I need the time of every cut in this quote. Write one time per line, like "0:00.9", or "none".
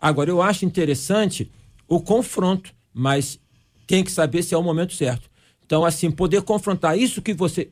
none